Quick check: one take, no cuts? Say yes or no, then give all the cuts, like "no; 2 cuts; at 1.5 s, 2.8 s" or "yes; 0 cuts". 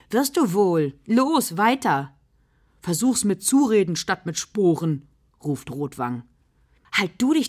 yes; 0 cuts